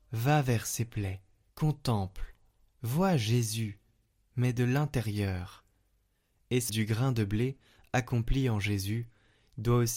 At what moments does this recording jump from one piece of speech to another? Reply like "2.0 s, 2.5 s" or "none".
1.5 s, 6.7 s